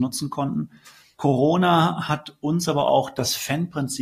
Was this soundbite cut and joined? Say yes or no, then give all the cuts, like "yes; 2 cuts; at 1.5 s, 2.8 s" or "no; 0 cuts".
no; 0 cuts